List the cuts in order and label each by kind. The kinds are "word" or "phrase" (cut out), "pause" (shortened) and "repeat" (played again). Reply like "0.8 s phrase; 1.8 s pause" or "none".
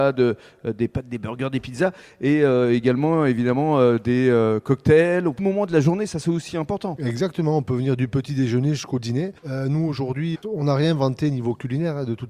5.4 s phrase; 9.4 s pause; 10.3 s word